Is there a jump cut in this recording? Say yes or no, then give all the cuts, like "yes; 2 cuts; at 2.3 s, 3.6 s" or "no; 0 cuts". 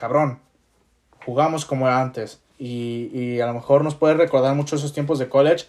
yes; 1 cut; at 2.5 s